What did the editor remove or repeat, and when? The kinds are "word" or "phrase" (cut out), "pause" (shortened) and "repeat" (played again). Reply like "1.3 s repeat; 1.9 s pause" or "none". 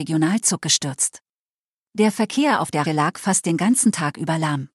2.9 s word